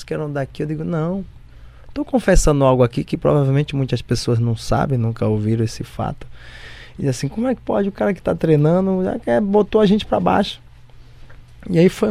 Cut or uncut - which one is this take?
uncut